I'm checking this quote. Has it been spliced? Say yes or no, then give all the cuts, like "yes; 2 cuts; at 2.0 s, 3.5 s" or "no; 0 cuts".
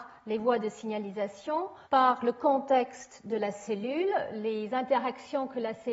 yes; 1 cut; at 1.8 s